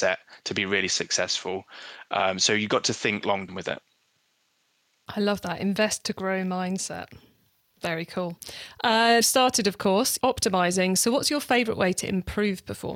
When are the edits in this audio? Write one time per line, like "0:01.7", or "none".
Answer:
0:03.5
0:09.2
0:10.2

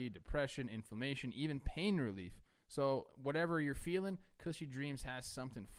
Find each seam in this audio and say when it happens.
none

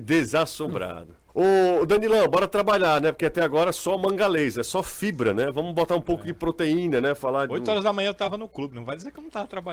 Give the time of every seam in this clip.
0:01.3

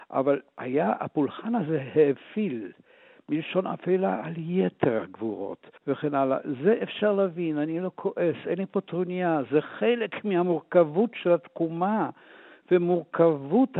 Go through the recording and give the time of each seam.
0:05.8

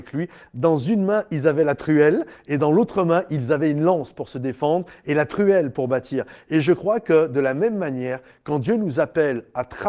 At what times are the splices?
none

